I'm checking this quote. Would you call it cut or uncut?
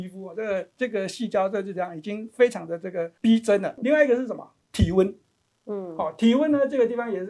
uncut